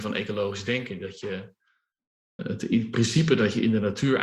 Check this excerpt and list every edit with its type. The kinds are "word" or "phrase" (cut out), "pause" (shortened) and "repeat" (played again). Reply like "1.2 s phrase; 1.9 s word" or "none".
2.4 s word